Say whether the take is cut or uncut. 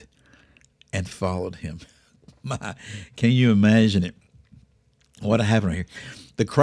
uncut